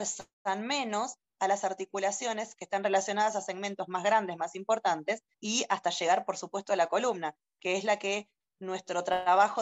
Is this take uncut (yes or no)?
no